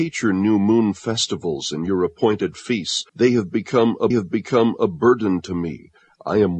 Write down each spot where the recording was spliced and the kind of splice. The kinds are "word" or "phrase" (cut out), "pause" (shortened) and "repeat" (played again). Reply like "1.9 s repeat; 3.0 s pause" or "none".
3.1 s pause; 4.1 s repeat